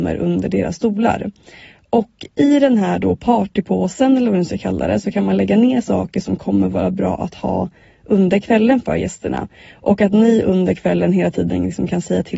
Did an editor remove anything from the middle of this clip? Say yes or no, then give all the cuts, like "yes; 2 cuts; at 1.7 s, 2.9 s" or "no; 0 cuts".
no; 0 cuts